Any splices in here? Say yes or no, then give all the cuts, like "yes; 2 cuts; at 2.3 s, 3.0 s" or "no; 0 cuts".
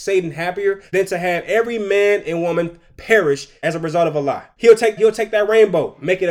yes; 1 cut; at 5.0 s